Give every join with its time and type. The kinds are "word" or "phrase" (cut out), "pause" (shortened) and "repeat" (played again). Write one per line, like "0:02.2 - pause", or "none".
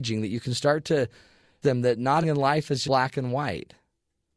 0:01.6 - word
0:02.2 - word
0:02.8 - word